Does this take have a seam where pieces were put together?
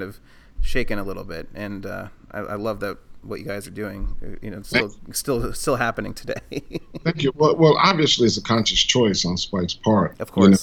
no; 0 cuts

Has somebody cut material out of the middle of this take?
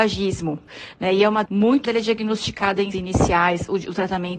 yes; 3 cuts; at 1.4 s, 1.8 s, 2.9 s

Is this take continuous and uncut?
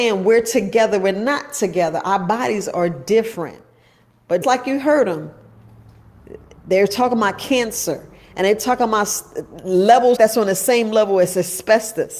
no; 2 cuts; at 4.4 s, 10.2 s

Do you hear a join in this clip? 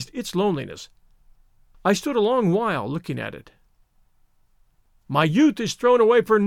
no; 0 cuts

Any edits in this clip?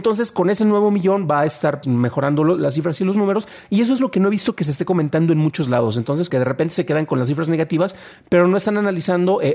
yes; 2 cuts; at 1.8 s, 6.3 s

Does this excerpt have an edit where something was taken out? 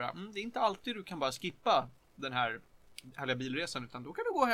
no; 0 cuts

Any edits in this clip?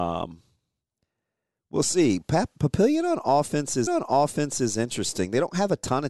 yes; 1 cut; at 3.9 s

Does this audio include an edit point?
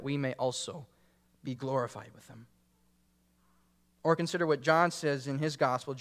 no; 0 cuts

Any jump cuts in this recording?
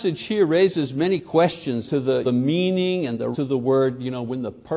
yes; 3 cuts; at 1.9 s, 2.2 s, 3.3 s

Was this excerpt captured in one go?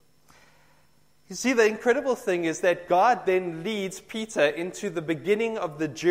yes; 0 cuts

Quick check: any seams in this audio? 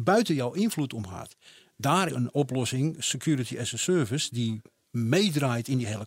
yes; 1 cut; at 2.1 s

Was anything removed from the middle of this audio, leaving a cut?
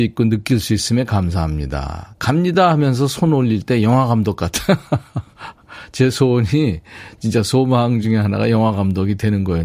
no; 0 cuts

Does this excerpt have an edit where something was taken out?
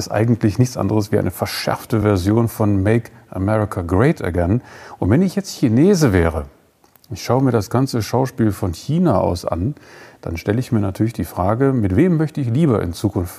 no; 0 cuts

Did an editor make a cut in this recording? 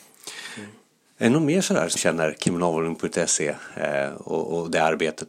yes; 1 cut; at 2.0 s

